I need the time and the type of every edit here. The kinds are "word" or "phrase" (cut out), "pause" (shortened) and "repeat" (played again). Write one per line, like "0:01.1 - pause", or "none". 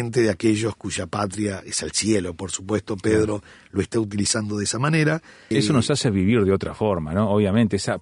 0:05.5 - word